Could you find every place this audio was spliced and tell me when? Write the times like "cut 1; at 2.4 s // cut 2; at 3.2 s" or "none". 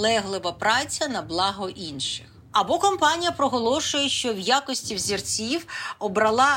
none